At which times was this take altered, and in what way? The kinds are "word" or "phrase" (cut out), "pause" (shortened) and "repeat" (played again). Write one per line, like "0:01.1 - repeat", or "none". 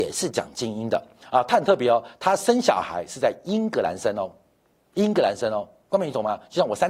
none